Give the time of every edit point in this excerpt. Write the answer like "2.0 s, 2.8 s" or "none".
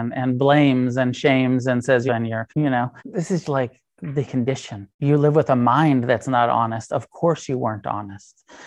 2.1 s, 2.5 s, 3.0 s, 3.4 s, 4.2 s, 4.9 s